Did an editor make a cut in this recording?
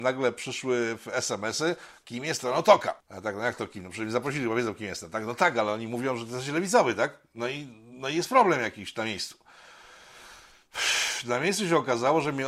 yes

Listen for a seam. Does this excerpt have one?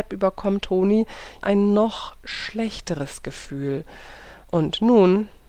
yes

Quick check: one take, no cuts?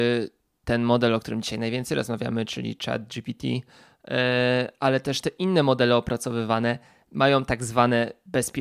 yes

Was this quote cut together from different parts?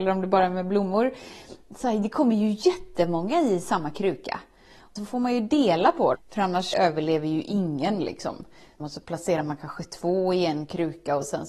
yes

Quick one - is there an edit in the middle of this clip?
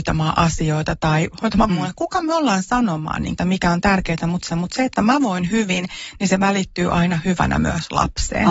yes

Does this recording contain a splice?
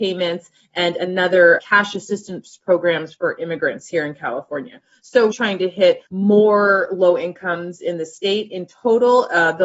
yes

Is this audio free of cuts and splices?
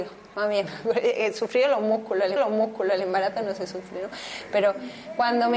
no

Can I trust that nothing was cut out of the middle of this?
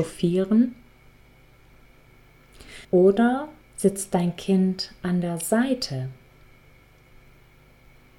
no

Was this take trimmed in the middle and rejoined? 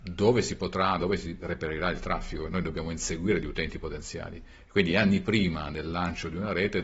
no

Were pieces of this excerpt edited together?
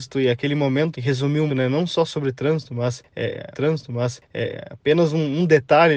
yes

